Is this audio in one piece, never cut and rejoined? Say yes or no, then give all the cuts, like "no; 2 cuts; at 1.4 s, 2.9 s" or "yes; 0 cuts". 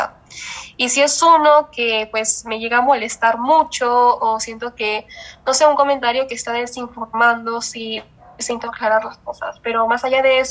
yes; 0 cuts